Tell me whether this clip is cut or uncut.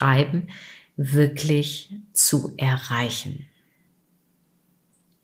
uncut